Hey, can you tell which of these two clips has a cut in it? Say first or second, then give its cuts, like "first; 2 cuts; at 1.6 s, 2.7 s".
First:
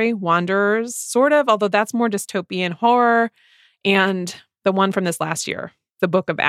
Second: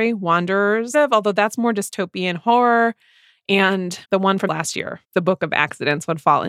second; 4 cuts; at 0.9 s, 4.0 s, 4.5 s, 5.0 s